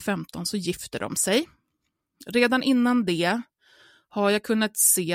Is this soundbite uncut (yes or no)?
yes